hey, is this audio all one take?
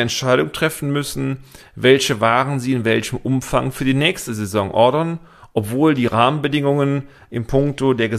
yes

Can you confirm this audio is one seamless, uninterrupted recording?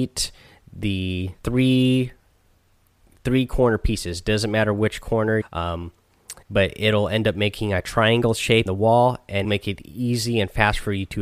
no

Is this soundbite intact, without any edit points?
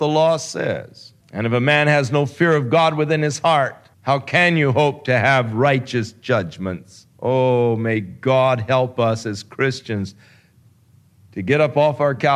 no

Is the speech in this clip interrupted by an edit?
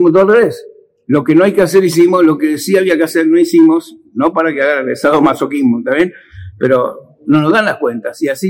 no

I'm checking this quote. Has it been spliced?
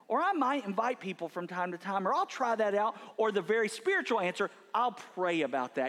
no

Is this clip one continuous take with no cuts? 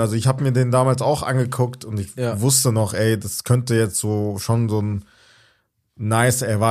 yes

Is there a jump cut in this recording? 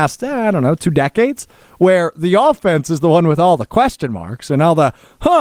no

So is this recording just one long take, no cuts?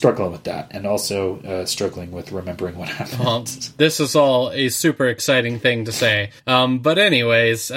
no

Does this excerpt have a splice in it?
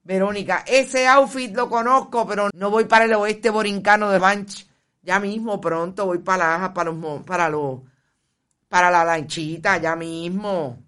yes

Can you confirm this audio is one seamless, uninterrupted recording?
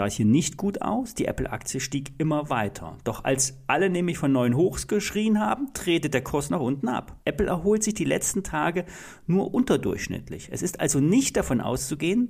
no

